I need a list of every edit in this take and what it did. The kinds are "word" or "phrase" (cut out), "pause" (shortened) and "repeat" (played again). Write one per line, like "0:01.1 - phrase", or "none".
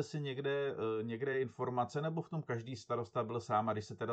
none